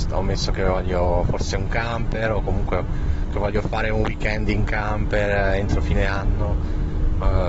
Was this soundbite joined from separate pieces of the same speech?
no; 0 cuts

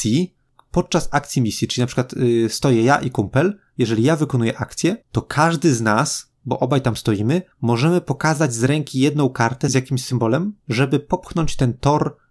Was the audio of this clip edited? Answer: yes; 4 cuts; at 5.0 s, 6.4 s, 7.5 s, 10.6 s

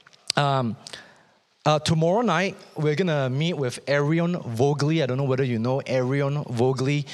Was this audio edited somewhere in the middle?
no; 0 cuts

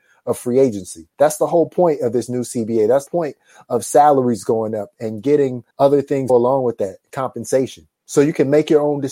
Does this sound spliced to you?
yes; 5 cuts; at 1.1 s, 3.1 s, 5.7 s, 6.3 s, 7.9 s

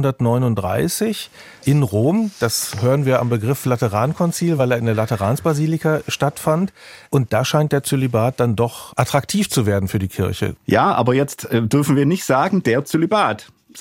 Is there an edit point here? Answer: no; 0 cuts

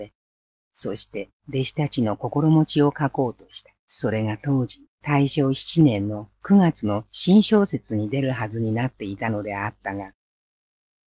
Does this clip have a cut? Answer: yes; 3 cuts; at 1.4 s, 3.8 s, 4.9 s

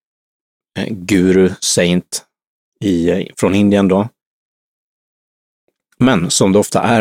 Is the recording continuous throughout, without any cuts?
yes; 0 cuts

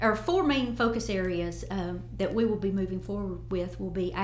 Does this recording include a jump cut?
no; 0 cuts

